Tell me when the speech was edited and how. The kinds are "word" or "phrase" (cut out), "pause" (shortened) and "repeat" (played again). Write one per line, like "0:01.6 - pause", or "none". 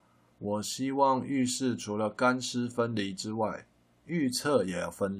none